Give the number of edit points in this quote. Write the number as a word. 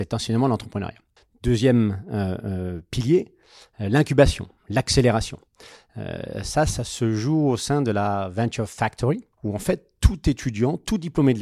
three